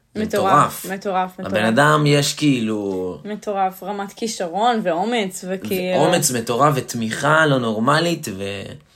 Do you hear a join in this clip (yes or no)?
no